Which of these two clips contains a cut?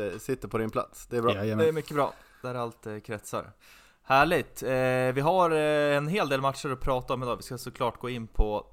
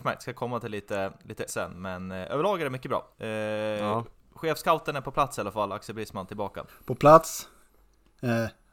second; 3 cuts; at 1.5 s, 3.1 s, 6.7 s

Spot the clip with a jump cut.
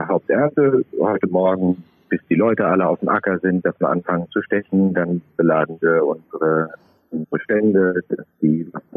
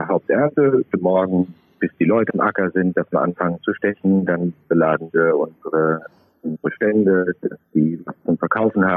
second; 2 cuts; at 0.9 s, 2.3 s

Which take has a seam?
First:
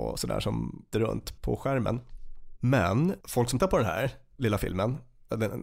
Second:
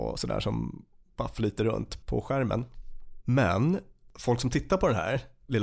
first; 3 cuts; at 0.9 s, 3.2 s, 3.6 s

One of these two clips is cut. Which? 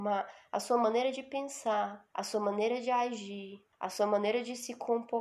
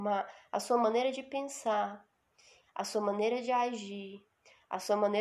first; 2 cuts; at 2.1 s, 3.7 s

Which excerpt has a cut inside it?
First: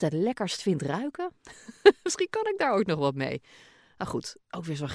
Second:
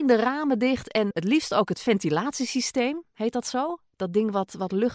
second; 1 cut; at 1.1 s

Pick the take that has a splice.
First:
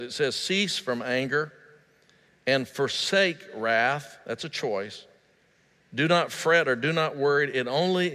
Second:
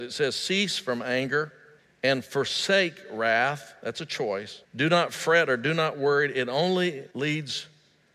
second; 3 cuts; at 1.8 s, 4.6 s, 7.1 s

